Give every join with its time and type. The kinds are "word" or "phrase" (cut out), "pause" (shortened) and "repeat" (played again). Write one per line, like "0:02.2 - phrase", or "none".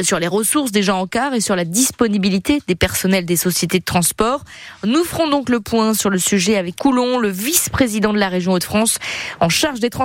0:06.8 - word